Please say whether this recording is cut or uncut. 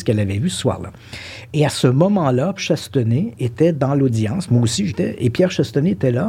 cut